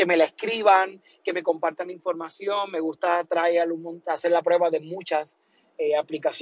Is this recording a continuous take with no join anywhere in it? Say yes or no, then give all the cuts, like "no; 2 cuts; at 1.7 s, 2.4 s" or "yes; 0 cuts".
yes; 0 cuts